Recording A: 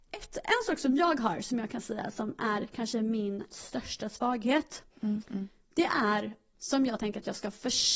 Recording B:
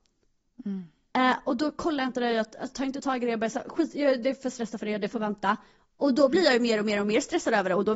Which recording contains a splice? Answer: A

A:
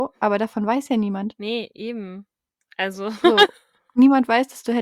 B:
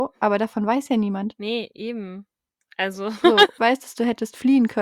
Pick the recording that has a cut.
B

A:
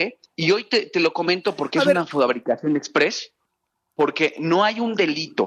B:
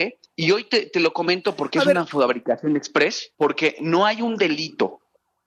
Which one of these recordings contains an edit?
B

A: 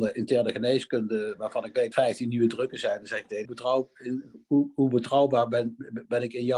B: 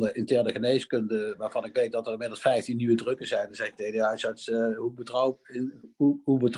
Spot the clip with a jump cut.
A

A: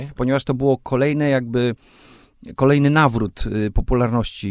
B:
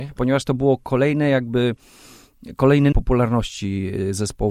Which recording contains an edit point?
B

